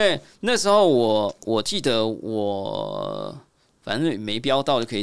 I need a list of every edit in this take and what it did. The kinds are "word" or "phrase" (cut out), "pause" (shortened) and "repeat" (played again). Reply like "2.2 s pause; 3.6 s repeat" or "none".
none